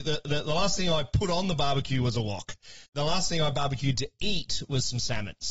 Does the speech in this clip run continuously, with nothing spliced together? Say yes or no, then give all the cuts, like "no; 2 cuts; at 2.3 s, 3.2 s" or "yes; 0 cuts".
no; 1 cut; at 2.9 s